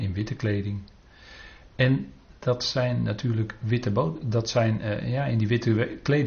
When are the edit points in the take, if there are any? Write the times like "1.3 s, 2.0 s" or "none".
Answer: none

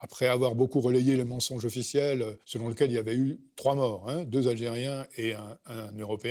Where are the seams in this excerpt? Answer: 2.4 s

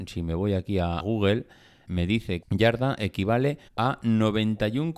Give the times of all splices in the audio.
1.0 s, 1.8 s, 2.4 s, 3.7 s

